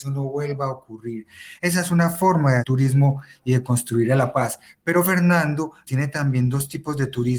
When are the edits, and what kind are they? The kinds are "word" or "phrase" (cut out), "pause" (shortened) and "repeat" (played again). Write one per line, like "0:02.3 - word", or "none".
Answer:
0:02.6 - word
0:05.9 - word